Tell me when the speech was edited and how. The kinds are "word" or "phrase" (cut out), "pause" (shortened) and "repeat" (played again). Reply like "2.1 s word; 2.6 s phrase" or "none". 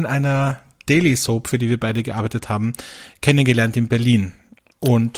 none